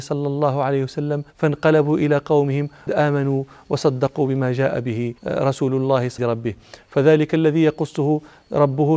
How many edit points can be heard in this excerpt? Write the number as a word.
four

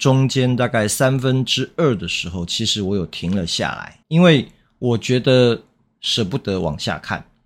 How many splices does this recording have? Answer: one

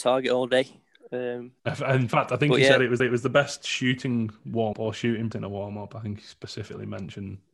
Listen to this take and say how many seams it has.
four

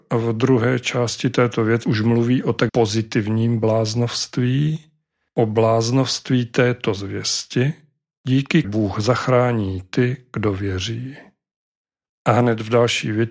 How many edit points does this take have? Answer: three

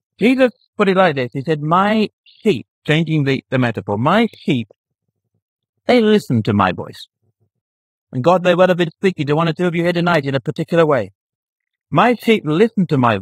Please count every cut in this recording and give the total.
zero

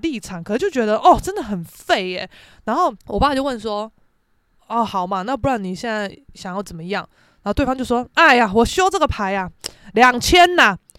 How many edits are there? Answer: one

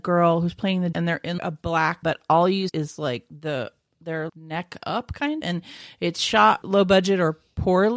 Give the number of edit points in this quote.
seven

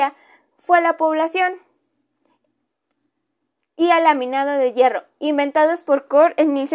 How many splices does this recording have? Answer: zero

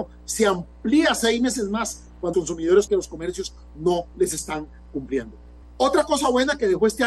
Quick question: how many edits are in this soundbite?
three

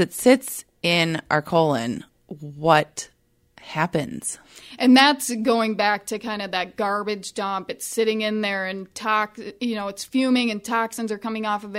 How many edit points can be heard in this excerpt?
zero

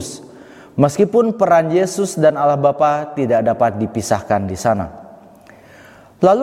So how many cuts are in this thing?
zero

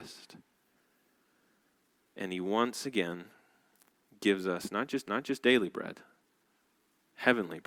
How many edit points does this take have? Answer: one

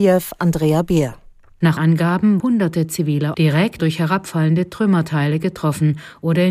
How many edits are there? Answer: four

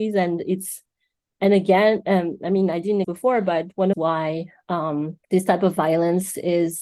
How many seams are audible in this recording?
three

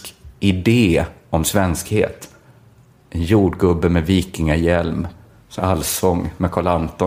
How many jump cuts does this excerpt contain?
one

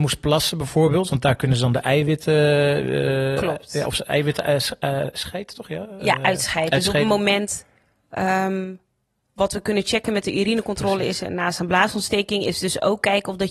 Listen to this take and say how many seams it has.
zero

